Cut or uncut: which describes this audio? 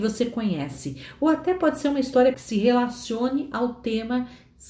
cut